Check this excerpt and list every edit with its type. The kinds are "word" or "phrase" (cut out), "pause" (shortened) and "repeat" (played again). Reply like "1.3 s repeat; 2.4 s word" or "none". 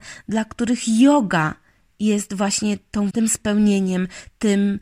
3.1 s word